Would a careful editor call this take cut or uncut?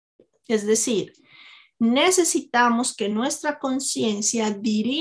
uncut